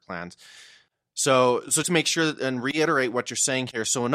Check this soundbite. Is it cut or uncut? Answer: cut